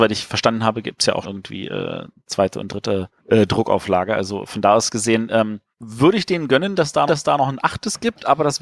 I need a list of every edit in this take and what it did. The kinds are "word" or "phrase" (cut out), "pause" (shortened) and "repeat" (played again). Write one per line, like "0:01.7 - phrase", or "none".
0:01.2 - word
0:03.2 - pause
0:05.7 - pause
0:07.1 - repeat